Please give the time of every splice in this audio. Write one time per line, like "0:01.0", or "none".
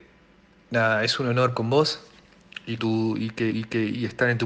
0:01.5
0:02.8
0:03.5

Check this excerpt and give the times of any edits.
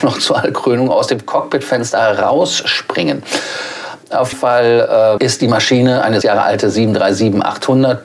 0:04.3
0:05.2
0:06.2

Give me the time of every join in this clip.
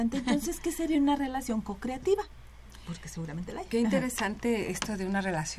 none

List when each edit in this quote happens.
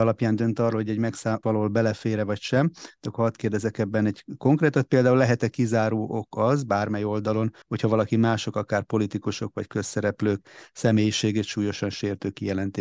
0:01.4
0:07.6

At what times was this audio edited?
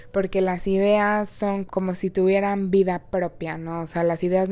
0:01.7

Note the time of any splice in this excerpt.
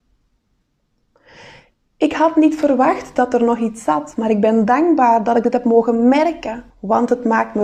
0:06.7

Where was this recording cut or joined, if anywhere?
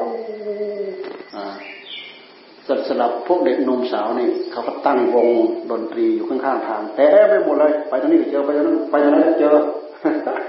0:01.3

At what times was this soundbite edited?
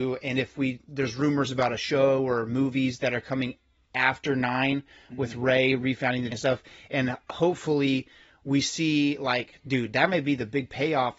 0:06.3

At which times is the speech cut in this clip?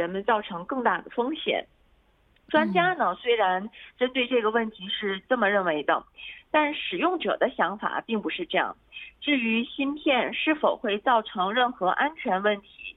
none

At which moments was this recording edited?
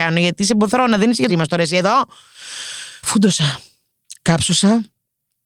0:01.3
0:03.0

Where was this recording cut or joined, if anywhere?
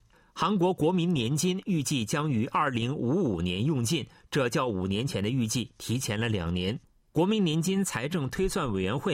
none

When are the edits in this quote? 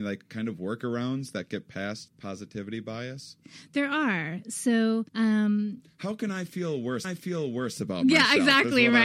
0:02.1
0:05.1
0:07.0

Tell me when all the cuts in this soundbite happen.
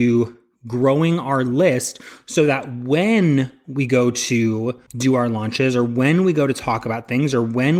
0:04.9

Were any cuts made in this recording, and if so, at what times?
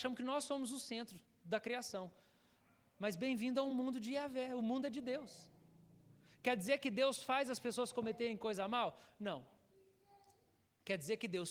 none

